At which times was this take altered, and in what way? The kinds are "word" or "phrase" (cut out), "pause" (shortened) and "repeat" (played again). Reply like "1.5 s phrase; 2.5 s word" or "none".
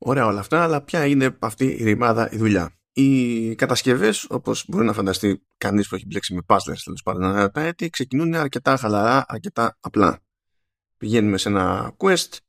2.8 s pause